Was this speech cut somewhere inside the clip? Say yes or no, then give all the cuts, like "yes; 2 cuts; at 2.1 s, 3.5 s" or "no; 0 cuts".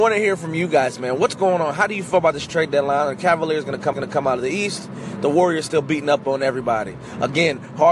yes; 1 cut; at 3.9 s